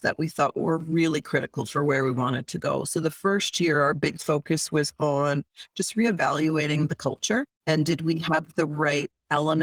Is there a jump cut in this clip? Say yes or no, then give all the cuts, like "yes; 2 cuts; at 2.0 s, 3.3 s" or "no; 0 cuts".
yes; 1 cut; at 7.5 s